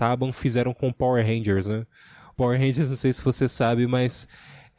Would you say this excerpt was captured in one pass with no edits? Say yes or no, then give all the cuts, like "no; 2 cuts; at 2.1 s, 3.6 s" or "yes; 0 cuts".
yes; 0 cuts